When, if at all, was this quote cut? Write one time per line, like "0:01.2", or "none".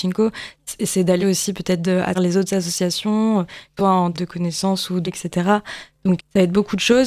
0:01.2
0:01.8
0:02.1
0:03.8
0:04.1
0:05.0
0:06.2

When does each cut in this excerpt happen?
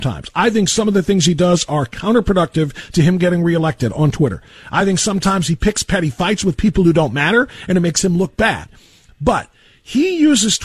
none

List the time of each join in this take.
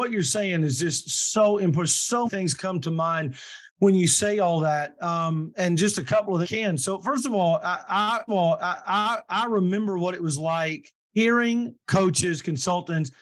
0:02.3
0:03.7
0:05.5
0:06.4
0:08.3
0:11.0

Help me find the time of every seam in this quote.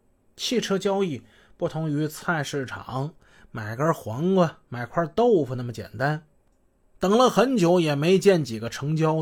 0:04.6

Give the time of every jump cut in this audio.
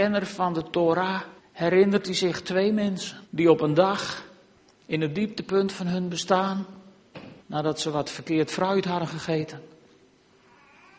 0:01.4
0:03.2
0:04.5
0:07.4

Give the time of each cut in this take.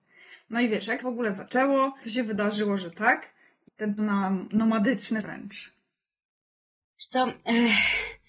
0:01.0
0:02.0
0:03.7
0:04.0
0:05.2

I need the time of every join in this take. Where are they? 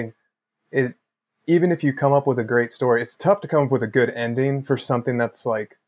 none

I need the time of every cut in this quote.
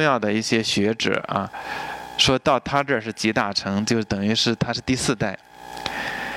none

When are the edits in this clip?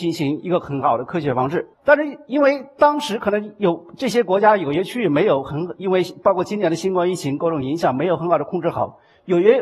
0:01.7

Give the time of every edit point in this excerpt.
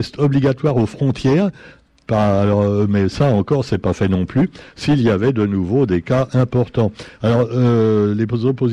none

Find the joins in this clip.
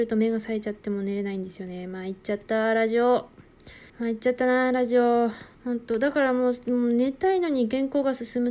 0:03.9
0:05.5

